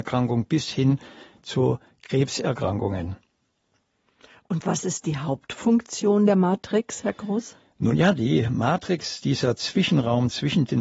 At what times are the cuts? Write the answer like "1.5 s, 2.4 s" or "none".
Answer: none